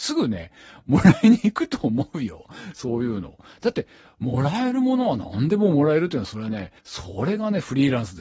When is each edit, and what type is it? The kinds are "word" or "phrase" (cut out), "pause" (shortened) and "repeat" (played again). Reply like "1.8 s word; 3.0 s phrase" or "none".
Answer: 6.8 s pause